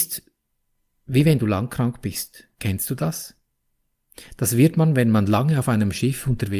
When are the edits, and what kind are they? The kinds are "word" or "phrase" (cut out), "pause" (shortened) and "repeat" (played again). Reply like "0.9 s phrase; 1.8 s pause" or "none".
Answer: 2.5 s pause